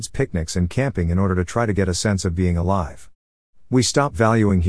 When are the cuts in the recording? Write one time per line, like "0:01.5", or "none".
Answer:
none